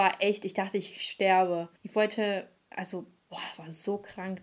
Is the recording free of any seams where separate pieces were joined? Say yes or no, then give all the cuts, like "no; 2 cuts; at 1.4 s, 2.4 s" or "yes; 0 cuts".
no; 1 cut; at 1.8 s